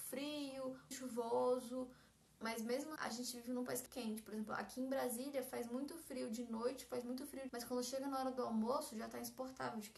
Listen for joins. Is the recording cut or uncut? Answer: cut